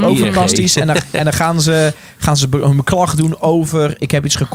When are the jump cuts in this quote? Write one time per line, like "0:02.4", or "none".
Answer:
none